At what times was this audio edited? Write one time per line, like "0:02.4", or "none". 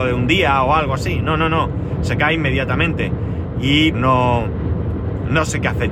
0:03.9